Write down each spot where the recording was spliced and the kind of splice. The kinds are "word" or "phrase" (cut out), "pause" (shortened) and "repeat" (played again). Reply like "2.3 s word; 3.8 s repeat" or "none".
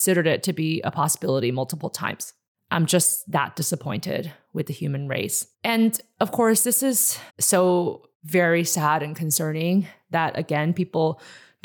5.5 s pause; 7.3 s pause